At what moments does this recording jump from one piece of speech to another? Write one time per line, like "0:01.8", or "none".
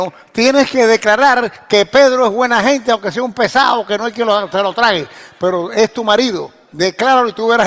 none

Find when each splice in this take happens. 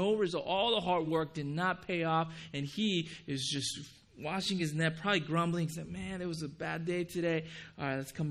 none

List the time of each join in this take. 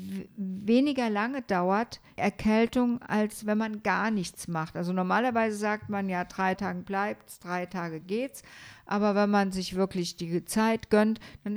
0:02.2
0:06.5

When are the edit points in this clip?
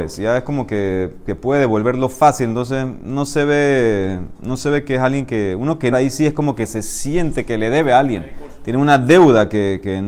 0:05.9

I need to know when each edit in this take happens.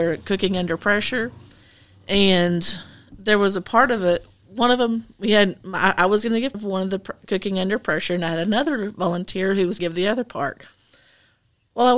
0:06.5
0:09.8

